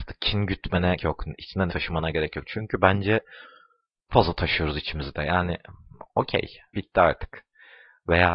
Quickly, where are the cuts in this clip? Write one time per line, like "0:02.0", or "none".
0:01.0
0:01.7
0:04.1
0:06.7